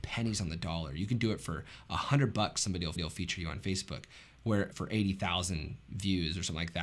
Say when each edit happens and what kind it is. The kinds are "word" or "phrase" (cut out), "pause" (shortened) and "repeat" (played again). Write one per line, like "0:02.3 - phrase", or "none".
0:03.0 - repeat
0:04.7 - word